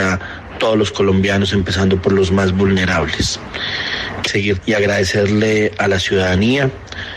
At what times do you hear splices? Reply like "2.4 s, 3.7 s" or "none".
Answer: 4.3 s, 4.6 s